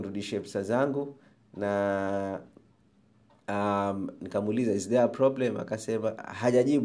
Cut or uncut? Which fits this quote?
uncut